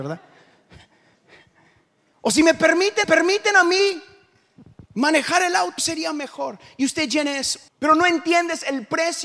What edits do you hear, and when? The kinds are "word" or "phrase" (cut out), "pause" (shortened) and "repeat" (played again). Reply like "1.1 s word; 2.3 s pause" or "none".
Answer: 3.0 s repeat; 4.9 s pause; 5.8 s word; 7.7 s pause